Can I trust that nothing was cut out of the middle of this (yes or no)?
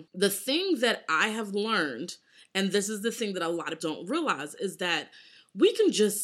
no